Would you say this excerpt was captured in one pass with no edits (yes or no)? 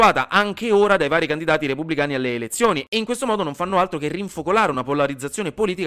yes